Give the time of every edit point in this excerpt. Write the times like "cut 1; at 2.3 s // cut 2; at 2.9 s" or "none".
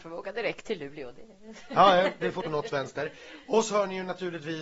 cut 1; at 2.4 s